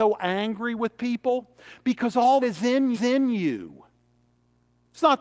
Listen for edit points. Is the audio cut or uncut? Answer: cut